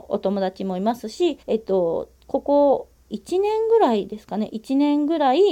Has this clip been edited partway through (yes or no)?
yes